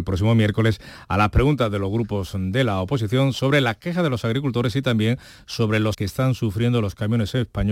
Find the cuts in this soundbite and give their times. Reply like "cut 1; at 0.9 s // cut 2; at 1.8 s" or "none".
cut 1; at 5.9 s